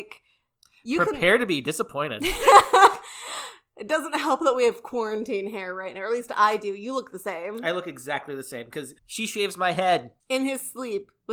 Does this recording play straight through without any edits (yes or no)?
no